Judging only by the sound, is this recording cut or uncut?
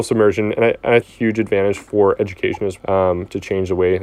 cut